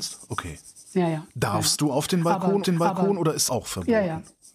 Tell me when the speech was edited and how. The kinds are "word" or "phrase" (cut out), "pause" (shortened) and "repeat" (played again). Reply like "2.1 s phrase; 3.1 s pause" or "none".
2.6 s repeat; 3.5 s word